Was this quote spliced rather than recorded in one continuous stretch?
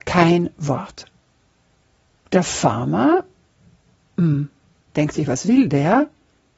no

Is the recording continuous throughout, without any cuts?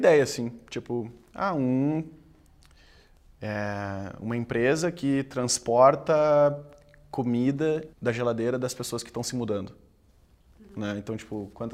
no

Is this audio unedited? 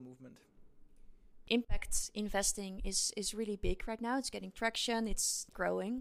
yes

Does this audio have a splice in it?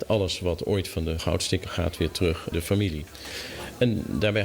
yes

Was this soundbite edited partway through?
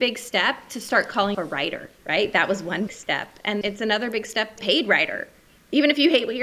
yes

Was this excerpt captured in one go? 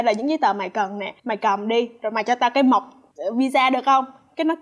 no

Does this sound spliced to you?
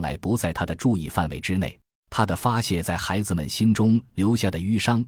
yes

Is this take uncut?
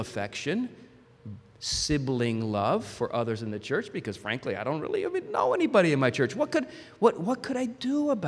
yes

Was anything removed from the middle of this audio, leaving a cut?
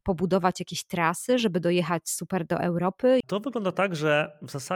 no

